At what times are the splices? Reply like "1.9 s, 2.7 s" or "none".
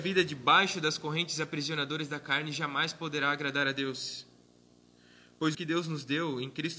5.5 s